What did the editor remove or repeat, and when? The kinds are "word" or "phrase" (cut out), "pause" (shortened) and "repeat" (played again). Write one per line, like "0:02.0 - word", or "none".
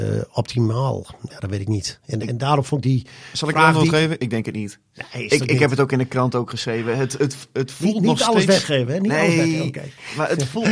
none